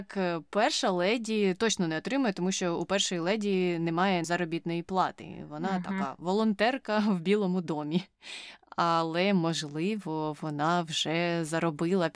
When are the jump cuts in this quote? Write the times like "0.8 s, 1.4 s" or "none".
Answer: 4.2 s